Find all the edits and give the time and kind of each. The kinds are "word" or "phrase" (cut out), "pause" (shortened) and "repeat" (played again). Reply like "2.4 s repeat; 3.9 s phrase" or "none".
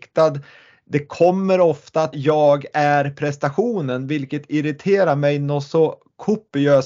2.1 s word